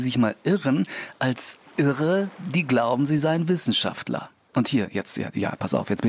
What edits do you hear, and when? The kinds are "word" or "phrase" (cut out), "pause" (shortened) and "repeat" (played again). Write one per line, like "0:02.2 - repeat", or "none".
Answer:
none